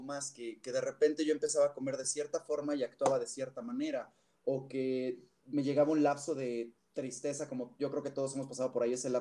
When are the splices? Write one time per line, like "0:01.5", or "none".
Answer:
none